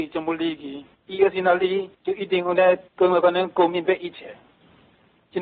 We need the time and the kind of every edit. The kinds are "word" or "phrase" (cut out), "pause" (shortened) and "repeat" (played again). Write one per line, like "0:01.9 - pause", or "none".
0:00.9 - pause
0:01.9 - pause
0:02.9 - pause